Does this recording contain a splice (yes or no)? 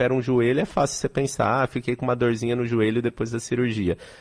no